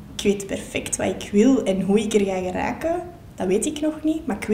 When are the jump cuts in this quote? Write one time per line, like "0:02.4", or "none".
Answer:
none